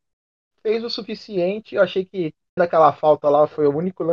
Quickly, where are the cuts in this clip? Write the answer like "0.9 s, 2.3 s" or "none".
2.6 s